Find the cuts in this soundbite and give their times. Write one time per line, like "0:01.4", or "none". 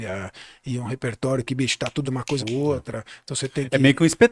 0:02.0
0:02.4